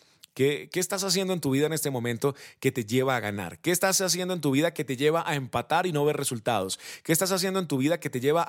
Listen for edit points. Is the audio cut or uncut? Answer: uncut